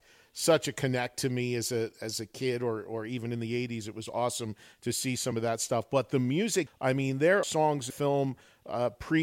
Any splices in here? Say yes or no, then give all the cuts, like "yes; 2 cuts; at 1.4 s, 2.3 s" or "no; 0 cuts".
yes; 3 cuts; at 6.7 s, 7.4 s, 7.9 s